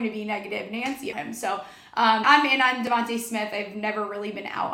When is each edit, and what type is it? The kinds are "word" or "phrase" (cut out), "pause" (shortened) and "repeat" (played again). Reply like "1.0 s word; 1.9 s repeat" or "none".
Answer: 1.1 s word; 2.2 s word